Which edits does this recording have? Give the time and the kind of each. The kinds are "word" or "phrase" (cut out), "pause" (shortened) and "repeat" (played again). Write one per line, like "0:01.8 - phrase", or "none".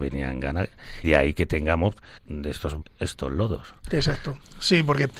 0:01.0 - word
0:02.2 - word
0:02.8 - word